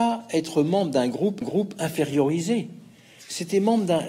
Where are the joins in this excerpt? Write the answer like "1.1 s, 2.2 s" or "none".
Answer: 1.4 s